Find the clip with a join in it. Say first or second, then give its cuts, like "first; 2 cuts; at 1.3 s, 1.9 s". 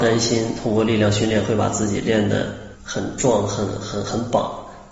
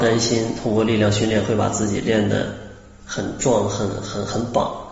first; 1 cut; at 2.8 s